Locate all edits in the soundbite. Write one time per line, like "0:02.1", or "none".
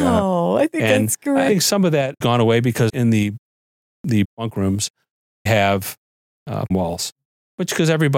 0:01.5
0:02.2
0:02.9
0:04.2
0:05.5
0:06.7